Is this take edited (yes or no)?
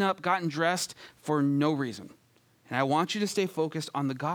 no